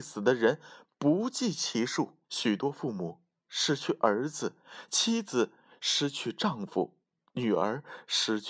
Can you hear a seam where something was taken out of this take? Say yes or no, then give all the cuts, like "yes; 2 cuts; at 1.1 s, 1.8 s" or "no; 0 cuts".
yes; 1 cut; at 2.2 s